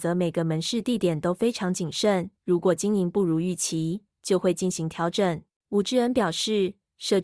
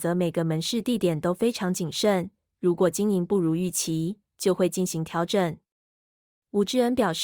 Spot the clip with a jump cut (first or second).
first